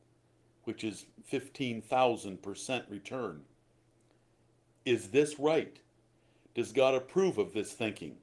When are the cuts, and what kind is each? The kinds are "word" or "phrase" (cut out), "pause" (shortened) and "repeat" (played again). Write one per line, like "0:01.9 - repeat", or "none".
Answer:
none